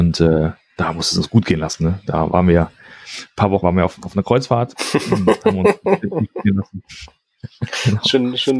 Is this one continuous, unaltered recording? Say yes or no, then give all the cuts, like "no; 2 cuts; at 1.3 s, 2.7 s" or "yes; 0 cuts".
no; 1 cut; at 3.6 s